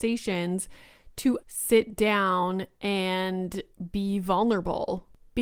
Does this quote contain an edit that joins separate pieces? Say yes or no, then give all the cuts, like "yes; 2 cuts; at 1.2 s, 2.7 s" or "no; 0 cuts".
yes; 1 cut; at 1.4 s